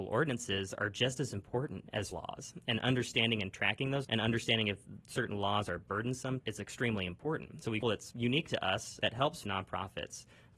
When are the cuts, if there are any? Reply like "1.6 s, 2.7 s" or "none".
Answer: 2.1 s, 4.0 s, 6.4 s, 7.8 s, 9.4 s